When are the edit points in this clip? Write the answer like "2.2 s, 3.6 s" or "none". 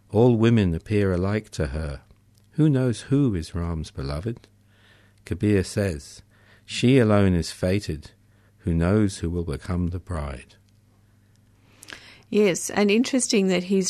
none

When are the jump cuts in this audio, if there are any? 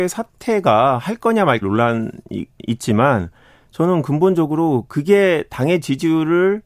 1.6 s

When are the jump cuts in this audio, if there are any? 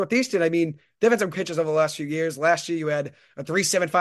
1.3 s

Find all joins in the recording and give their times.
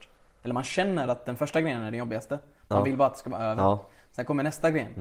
none

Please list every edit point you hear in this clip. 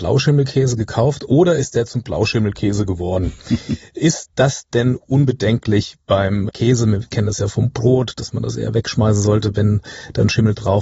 6.5 s

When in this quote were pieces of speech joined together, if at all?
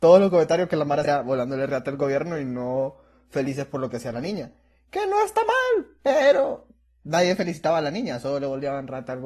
1.0 s

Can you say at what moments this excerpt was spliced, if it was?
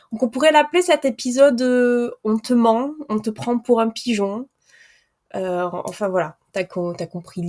none

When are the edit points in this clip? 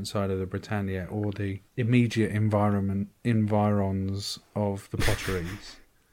1.7 s

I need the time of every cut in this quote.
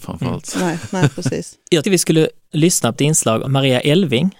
1.8 s, 2.5 s, 2.9 s, 3.4 s

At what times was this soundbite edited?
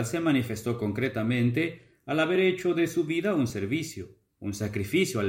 none

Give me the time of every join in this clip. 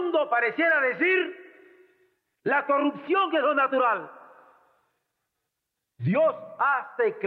none

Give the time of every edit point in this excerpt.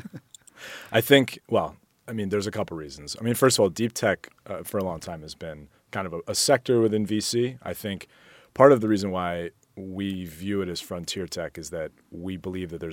none

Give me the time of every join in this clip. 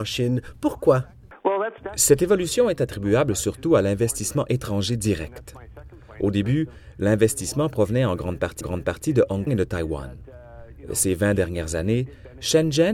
8.6 s, 9.5 s

